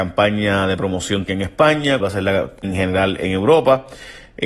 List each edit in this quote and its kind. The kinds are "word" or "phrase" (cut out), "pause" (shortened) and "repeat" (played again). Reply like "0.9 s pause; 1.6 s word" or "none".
1.3 s word; 2.0 s word; 2.6 s word